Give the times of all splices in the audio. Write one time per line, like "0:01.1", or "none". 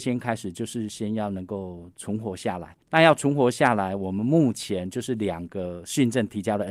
0:02.8